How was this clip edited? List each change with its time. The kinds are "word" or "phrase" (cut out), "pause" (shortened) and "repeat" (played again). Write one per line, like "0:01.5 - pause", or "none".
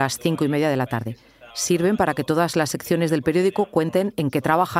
0:01.5 - pause